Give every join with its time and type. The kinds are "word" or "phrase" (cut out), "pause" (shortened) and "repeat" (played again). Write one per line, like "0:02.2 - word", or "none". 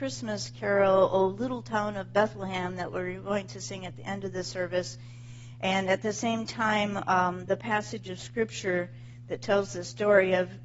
none